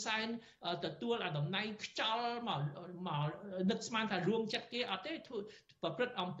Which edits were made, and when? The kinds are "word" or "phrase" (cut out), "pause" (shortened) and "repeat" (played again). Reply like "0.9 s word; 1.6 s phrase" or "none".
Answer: none